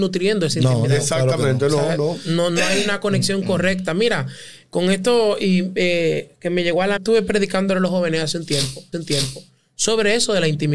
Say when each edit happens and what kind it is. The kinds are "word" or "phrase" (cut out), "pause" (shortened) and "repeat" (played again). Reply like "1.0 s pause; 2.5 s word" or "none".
7.0 s phrase; 8.9 s repeat

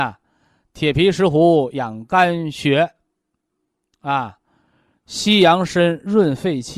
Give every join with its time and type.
none

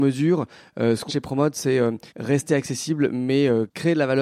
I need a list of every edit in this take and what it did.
1.1 s word; 2.1 s pause

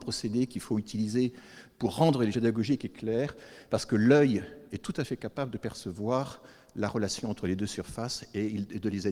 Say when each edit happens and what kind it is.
2.3 s word

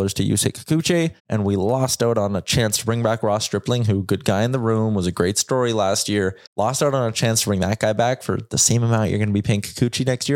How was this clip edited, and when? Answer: 1.2 s pause; 6.5 s pause

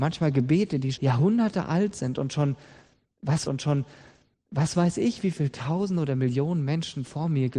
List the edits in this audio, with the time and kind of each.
0.9 s word; 3.4 s repeat

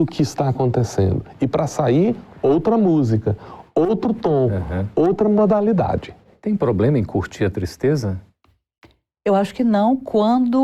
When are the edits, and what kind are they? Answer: none

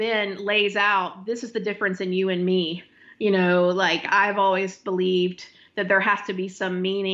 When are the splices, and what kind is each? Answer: none

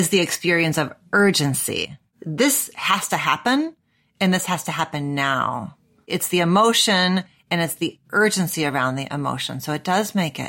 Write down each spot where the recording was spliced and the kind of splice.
none

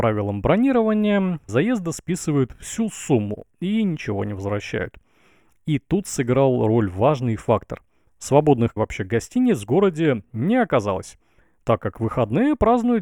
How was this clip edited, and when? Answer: 1.5 s phrase; 8.8 s phrase

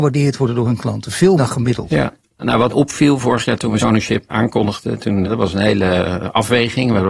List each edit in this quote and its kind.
1.4 s word; 2.4 s word; 2.7 s word; 3.8 s word; 4.3 s word; 5.2 s word

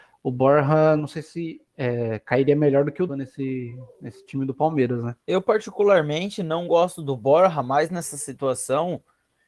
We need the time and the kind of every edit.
1.7 s pause; 3.1 s phrase; 5.2 s pause

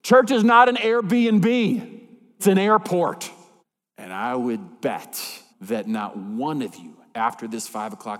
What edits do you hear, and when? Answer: 2.4 s word; 3.6 s pause; 5.5 s word

